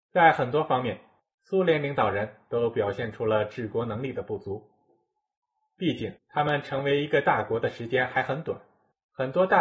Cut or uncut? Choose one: uncut